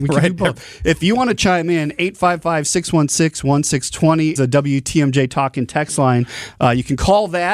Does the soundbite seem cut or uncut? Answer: cut